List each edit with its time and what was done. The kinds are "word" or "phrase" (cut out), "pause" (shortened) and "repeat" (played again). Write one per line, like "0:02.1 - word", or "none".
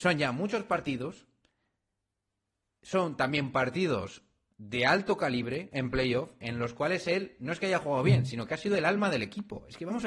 none